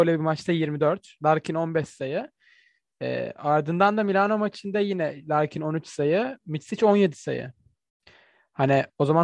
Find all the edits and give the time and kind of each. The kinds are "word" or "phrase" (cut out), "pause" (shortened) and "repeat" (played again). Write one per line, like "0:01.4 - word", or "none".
none